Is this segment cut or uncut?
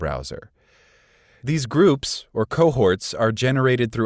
uncut